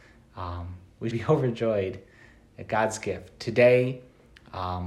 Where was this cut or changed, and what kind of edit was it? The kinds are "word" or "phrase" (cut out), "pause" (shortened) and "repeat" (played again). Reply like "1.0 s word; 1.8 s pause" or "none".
1.1 s word